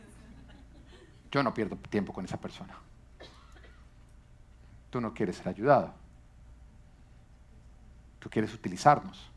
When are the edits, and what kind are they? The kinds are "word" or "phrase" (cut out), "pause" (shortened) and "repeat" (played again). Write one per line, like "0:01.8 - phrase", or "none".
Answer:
none